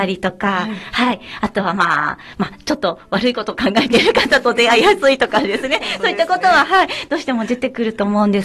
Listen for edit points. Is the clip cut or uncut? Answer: uncut